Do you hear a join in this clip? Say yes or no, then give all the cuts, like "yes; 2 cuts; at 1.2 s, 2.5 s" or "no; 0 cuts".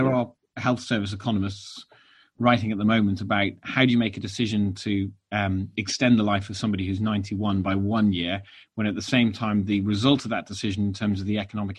no; 0 cuts